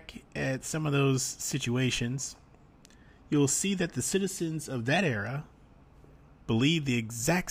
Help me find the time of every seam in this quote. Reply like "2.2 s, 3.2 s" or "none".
none